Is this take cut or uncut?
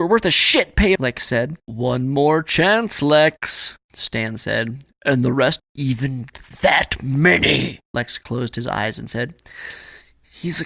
cut